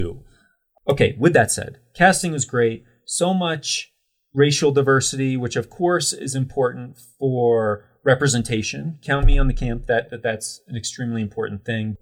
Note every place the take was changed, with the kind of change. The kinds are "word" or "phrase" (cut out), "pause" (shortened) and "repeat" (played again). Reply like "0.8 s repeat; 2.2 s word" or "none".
9.9 s word